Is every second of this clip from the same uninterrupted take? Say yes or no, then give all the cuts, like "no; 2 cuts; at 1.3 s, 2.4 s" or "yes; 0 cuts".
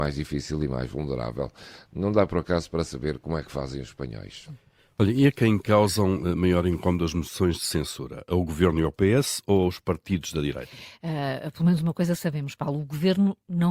yes; 0 cuts